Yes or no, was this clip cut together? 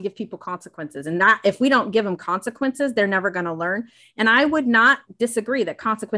no